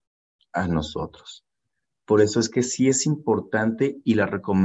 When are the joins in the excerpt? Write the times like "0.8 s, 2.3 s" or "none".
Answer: none